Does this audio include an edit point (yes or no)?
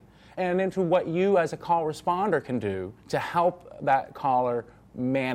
yes